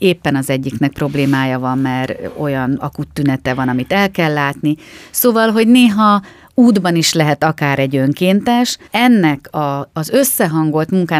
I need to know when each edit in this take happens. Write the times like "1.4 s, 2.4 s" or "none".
8.9 s